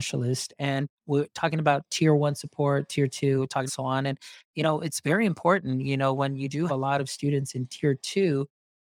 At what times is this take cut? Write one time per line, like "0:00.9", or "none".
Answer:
0:01.0
0:03.7
0:06.7